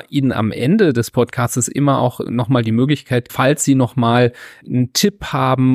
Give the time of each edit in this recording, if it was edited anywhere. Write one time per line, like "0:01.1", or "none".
0:03.3
0:04.6